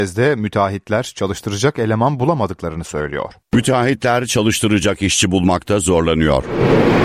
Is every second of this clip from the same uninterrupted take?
no; 1 cut; at 3.4 s

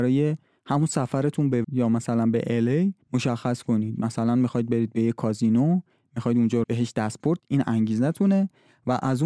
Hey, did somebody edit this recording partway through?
yes; 4 cuts; at 1.6 s, 3.0 s, 6.6 s, 7.4 s

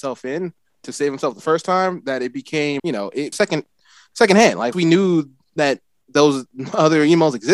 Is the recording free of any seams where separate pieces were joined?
no; 3 cuts; at 2.8 s, 3.3 s, 4.7 s

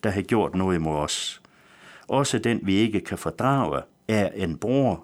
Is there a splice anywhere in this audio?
no; 0 cuts

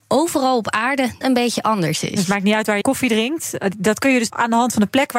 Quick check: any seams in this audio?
yes; 3 cuts; at 1.2 s, 2.8 s, 4.3 s

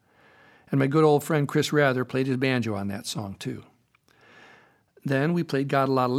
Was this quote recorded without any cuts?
yes; 0 cuts

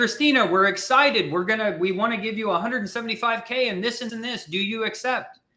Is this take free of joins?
no; 1 cut; at 4.1 s

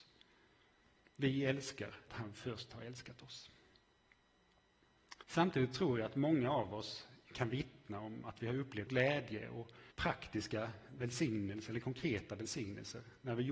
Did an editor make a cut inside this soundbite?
yes; 4 cuts; at 2.1 s, 5.2 s, 8.9 s, 9.9 s

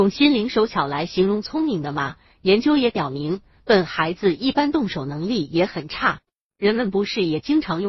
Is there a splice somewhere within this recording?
no; 0 cuts

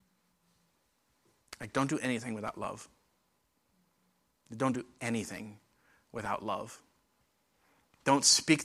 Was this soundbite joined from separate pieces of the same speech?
no; 0 cuts

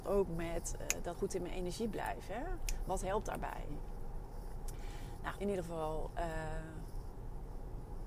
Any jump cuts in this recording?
yes; 2 cuts; at 1.1 s, 5.4 s

